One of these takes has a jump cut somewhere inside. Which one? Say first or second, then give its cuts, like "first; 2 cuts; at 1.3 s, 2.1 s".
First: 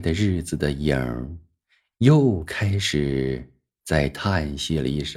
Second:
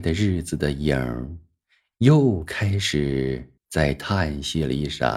second; 1 cut; at 3.6 s